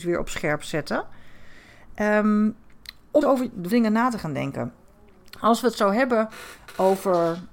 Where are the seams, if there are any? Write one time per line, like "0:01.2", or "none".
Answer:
0:03.2
0:03.7